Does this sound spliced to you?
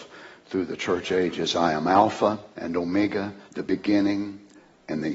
yes; 2 cuts; at 2.5 s, 3.5 s

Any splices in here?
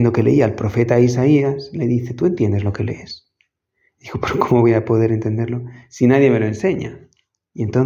no; 0 cuts

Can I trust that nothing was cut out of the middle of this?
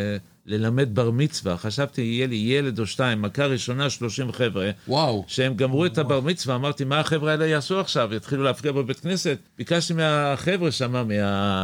no; 1 cut; at 9.5 s

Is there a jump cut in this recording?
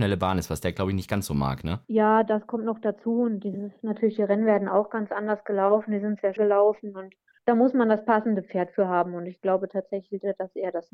yes; 3 cuts; at 1.8 s, 6.4 s, 7.4 s

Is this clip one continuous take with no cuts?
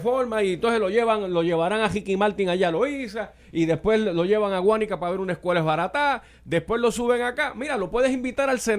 yes; 0 cuts

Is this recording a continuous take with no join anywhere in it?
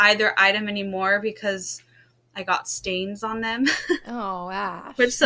yes; 0 cuts

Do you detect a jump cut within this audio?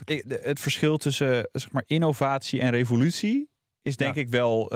no; 0 cuts

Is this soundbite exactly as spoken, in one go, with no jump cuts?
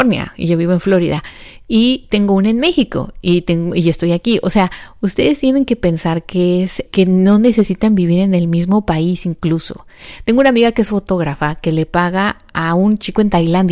no; 1 cut; at 6.9 s

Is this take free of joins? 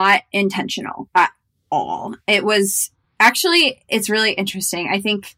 yes; 0 cuts

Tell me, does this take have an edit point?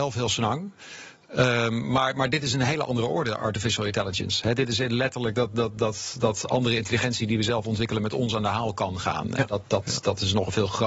no; 0 cuts

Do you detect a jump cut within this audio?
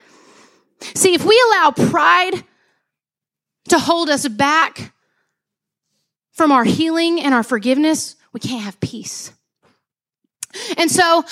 no; 0 cuts

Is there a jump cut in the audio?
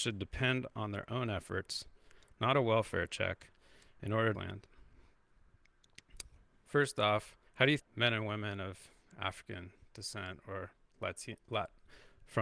yes; 3 cuts; at 4.3 s, 7.5 s, 7.8 s

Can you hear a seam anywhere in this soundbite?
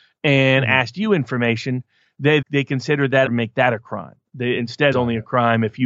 yes; 3 cuts; at 2.4 s, 3.3 s, 4.9 s

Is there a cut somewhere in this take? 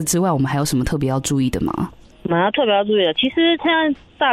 no; 0 cuts

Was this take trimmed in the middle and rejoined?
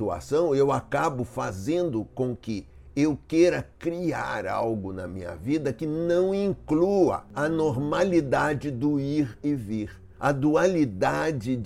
no; 0 cuts

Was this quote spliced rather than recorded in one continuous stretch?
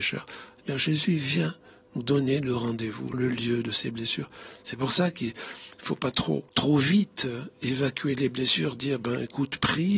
yes; 2 cuts; at 3.1 s, 6.5 s

